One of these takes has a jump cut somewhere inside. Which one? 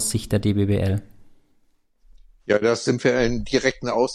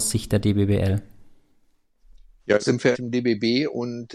second; 2 cuts; at 2.6 s, 2.9 s

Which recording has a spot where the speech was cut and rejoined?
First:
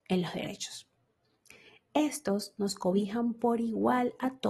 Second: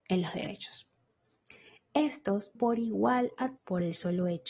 second; 2 cuts; at 2.5 s, 3.6 s

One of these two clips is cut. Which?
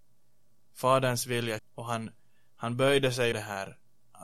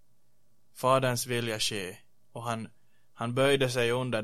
first; 2 cuts; at 1.6 s, 3.3 s

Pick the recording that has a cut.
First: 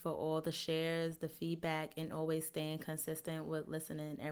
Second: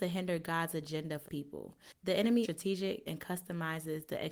second; 3 cuts; at 1.2 s, 2.4 s, 3.1 s

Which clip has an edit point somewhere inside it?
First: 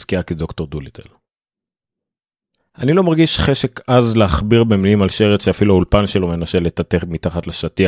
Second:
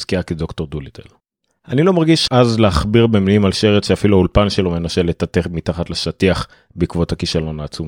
second; 2 cuts; at 1.2 s, 2.3 s

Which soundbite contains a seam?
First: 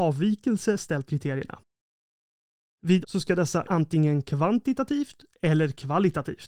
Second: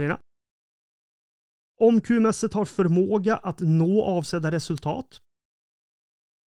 first; 3 cuts; at 1.1 s, 3.0 s, 3.6 s

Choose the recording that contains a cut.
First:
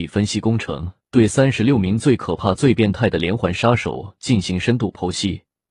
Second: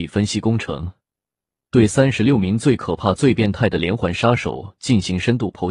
first; 1 cut; at 1.0 s

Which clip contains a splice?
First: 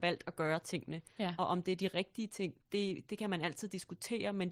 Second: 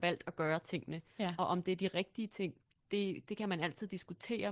first; 1 cut; at 2.6 s

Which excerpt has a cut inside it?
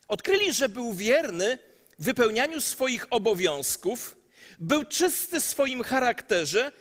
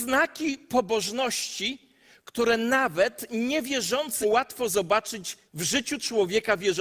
second; 2 cuts; at 4.2 s, 5.5 s

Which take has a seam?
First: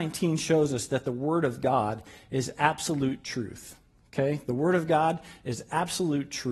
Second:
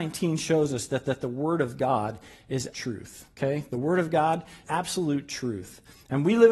second; 4 cuts; at 1.0 s, 2.7 s, 3.3 s, 4.6 s

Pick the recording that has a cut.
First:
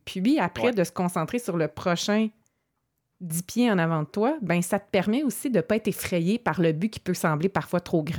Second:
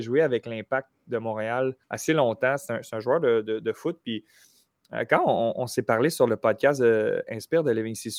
second; 1 cut; at 1.8 s

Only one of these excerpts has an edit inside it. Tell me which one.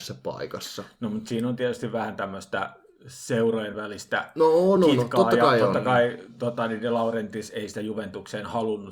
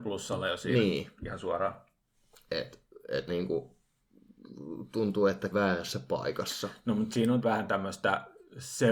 second; 3 cuts; at 3.3 s, 5.5 s, 7.4 s

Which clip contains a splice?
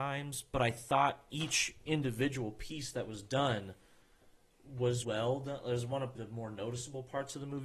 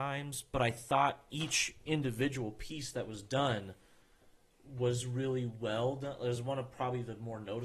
first; 2 cuts; at 5.0 s, 6.1 s

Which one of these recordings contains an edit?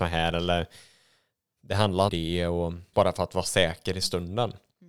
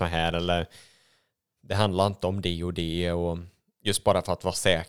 first; 2 cuts; at 2.1 s, 2.9 s

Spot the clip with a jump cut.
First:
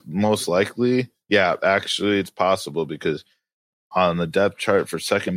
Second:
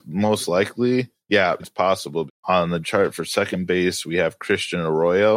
second; 3 cuts; at 1.6 s, 2.3 s, 2.8 s

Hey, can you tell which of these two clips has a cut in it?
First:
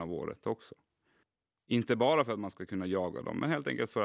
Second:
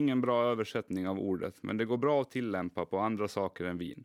first; 1 cut; at 1.2 s

